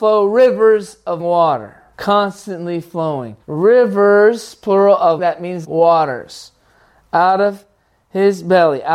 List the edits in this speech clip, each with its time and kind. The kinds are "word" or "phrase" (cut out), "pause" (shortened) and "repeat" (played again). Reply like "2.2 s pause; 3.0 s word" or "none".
1.2 s word; 1.9 s pause; 3.4 s pause; 5.2 s word; 5.6 s word